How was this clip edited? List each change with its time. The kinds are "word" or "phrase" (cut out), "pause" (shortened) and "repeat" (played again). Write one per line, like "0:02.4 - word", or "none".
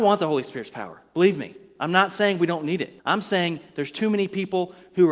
0:03.0 - pause